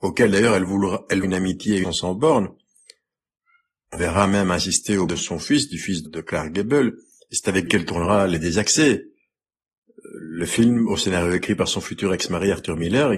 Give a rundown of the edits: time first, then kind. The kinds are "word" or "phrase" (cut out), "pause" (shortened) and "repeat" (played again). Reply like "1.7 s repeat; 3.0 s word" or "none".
1.2 s word; 1.8 s word; 4.0 s word; 5.1 s word; 6.1 s word; 7.7 s word